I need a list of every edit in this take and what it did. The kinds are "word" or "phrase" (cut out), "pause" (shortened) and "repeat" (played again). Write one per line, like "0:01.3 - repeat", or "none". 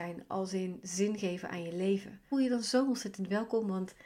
0:02.3 - word